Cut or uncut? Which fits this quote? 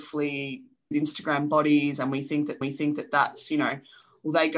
cut